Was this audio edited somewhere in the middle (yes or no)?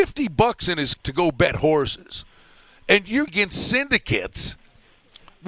yes